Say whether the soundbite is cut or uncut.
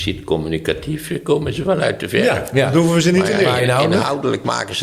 uncut